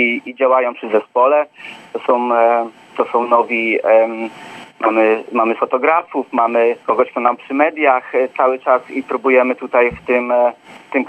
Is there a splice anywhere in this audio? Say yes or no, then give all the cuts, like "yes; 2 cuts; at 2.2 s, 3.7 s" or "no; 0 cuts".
yes; 3 cuts; at 5.6 s, 6.8 s, 7.4 s